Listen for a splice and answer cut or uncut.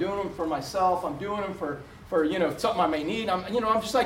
uncut